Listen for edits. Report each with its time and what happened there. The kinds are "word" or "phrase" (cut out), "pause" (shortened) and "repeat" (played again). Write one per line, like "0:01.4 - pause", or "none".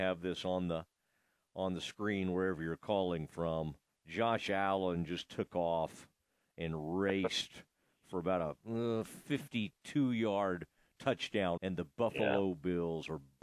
0:03.9 - pause
0:11.6 - word